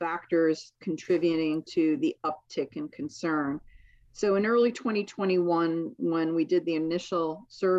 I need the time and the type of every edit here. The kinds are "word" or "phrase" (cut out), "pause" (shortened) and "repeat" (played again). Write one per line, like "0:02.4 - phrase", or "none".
none

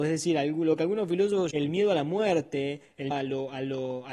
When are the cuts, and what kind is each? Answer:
0:01.5 - word
0:03.1 - word

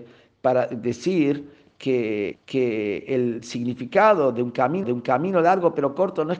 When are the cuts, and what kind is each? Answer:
0:02.3 - repeat
0:04.8 - repeat

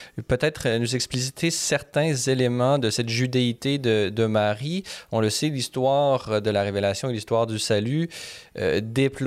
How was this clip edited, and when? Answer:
none

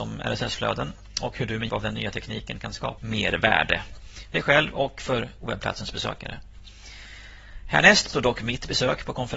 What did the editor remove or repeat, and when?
0:01.7 - word
0:03.0 - word
0:04.3 - word
0:08.1 - phrase

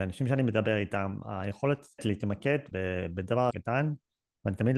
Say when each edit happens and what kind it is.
0:02.0 - word
0:02.7 - word
0:03.5 - word

